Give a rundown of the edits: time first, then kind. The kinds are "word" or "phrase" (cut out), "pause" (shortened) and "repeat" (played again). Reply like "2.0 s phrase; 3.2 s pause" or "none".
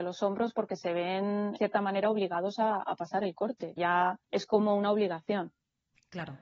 1.6 s word; 3.8 s word; 4.2 s pause